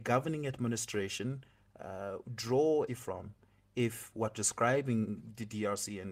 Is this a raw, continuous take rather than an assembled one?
no; 2 cuts; at 2.9 s, 4.3 s

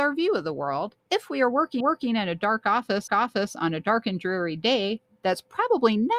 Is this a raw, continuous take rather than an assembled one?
no; 3 cuts; at 1.0 s, 1.8 s, 3.1 s

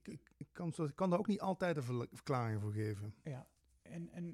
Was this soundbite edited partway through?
no; 0 cuts

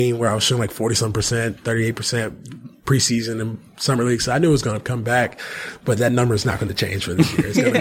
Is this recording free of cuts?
yes; 0 cuts

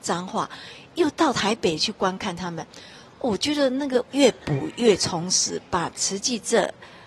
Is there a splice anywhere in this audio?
no; 0 cuts

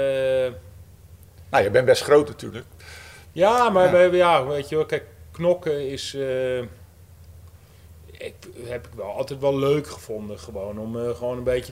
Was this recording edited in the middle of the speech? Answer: no; 0 cuts

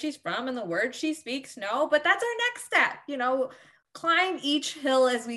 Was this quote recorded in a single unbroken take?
yes; 0 cuts

